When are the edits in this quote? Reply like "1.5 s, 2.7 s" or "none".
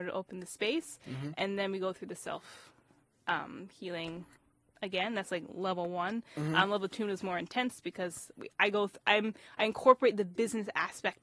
none